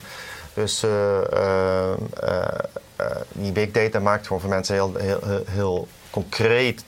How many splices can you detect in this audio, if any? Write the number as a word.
zero